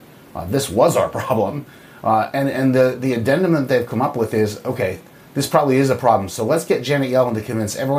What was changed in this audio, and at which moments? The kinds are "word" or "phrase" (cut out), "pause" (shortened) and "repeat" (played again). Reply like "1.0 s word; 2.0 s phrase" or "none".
none

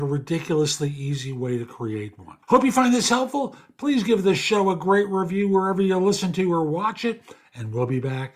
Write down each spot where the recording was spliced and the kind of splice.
2.4 s pause

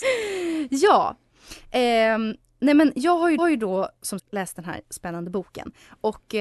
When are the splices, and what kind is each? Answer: 3.4 s repeat; 4.2 s word

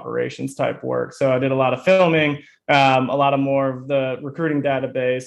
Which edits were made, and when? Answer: none

